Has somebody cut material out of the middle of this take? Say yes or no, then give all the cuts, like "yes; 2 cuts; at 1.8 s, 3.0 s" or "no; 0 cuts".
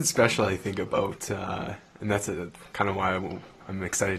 no; 0 cuts